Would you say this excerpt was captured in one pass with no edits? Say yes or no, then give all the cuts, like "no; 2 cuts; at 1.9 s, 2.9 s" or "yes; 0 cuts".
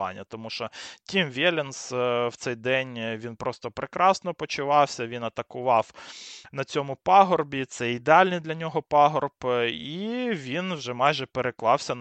yes; 0 cuts